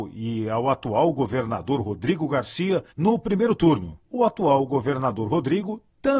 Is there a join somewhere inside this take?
yes; 2 cuts; at 2.9 s, 4.0 s

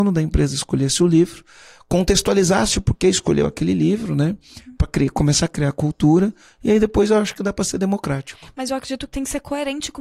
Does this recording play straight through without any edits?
yes; 0 cuts

